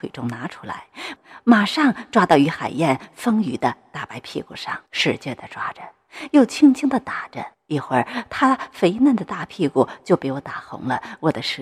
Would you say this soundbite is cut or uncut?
cut